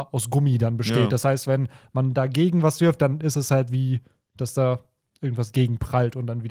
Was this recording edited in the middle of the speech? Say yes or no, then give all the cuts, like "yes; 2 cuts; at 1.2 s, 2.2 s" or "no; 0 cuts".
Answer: no; 0 cuts